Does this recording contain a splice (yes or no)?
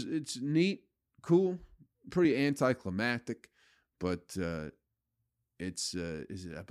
no